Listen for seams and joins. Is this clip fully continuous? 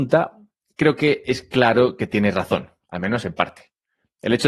yes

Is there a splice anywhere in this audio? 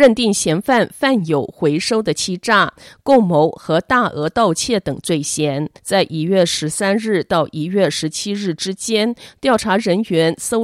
yes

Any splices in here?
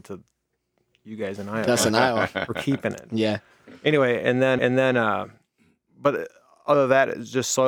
yes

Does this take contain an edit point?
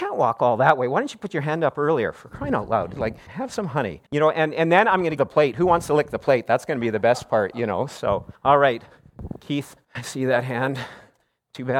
yes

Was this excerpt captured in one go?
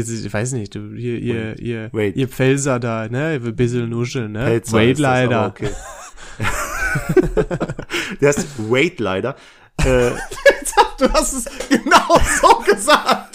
yes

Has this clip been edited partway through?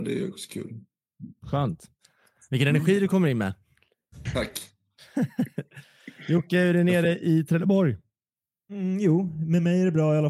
no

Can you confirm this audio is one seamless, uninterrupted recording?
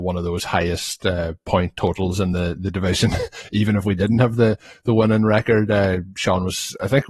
yes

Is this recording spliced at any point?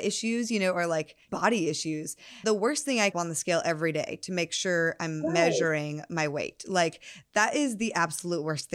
yes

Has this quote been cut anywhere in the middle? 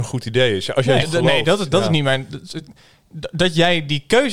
yes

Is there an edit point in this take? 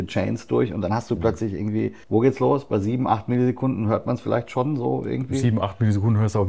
yes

